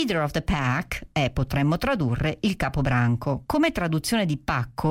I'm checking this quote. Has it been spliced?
no; 0 cuts

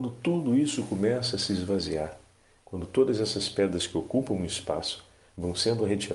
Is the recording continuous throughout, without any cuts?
yes; 0 cuts

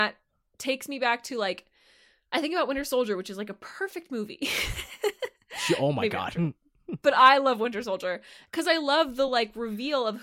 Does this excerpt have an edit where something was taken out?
no; 0 cuts

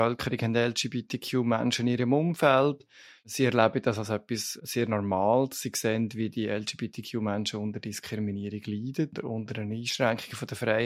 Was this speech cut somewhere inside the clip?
no; 0 cuts

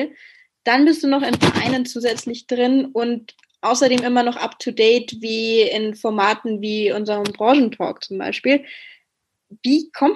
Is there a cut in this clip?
no; 0 cuts

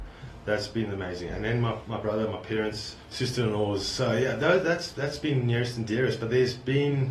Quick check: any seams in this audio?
yes; 1 cut; at 3.0 s

